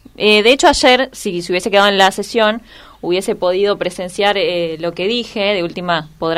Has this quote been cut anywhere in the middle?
no; 0 cuts

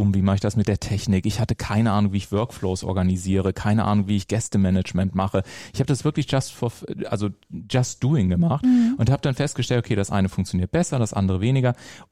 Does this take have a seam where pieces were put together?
no; 0 cuts

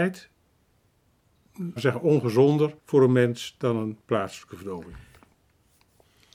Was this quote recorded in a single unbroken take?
no; 2 cuts; at 1.8 s, 2.8 s

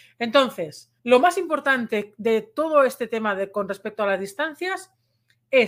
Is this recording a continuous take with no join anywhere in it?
no; 1 cut; at 1.0 s

